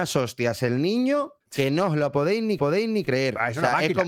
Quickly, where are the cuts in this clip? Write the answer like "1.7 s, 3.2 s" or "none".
1.4 s, 2.6 s